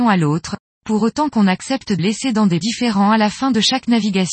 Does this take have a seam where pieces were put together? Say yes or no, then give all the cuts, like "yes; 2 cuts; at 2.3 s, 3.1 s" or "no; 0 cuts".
yes; 2 cuts; at 2.0 s, 2.6 s